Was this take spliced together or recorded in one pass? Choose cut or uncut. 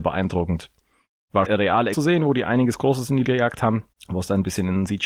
cut